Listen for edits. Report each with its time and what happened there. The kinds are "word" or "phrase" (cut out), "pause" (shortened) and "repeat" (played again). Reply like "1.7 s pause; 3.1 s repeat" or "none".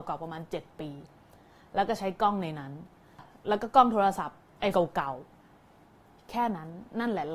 4.7 s word